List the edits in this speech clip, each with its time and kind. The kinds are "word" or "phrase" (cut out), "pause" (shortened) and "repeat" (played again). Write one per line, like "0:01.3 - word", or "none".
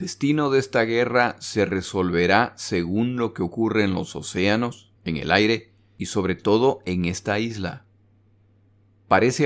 0:05.0 - pause